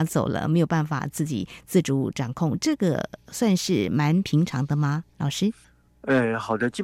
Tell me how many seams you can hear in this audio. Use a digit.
1